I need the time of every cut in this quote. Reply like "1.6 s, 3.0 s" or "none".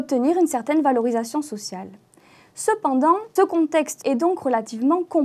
3.4 s, 4.0 s